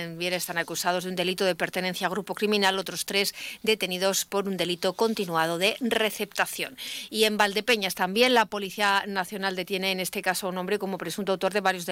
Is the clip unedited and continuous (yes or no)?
yes